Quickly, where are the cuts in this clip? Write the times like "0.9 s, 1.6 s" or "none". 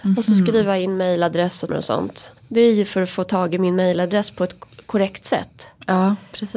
1.7 s, 2.4 s